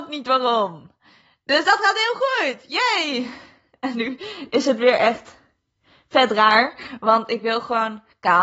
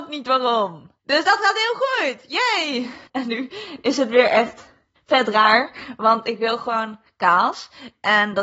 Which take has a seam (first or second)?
second